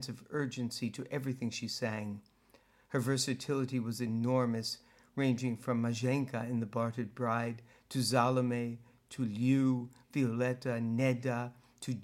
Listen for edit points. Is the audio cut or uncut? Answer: uncut